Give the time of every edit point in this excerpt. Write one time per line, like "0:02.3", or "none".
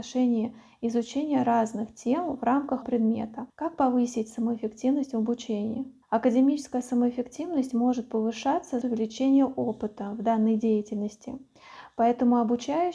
0:02.8
0:03.5
0:06.0
0:08.8